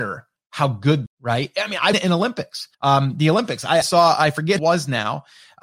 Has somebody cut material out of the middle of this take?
yes; 5 cuts; at 1.1 s, 1.9 s, 2.7 s, 3.8 s, 4.6 s

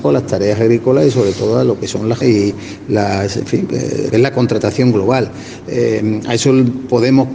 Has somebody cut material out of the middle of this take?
yes; 2 cuts; at 2.2 s, 4.1 s

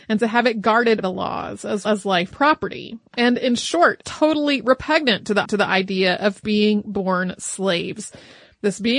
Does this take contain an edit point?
yes; 5 cuts; at 1.0 s, 1.8 s, 2.3 s, 4.0 s, 5.4 s

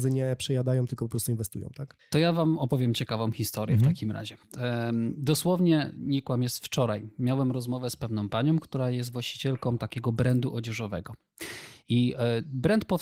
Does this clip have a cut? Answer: no; 0 cuts

